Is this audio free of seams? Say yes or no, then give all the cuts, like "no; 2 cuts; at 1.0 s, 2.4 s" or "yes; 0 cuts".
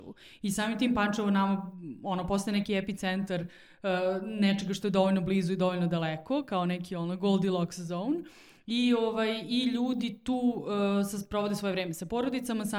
yes; 0 cuts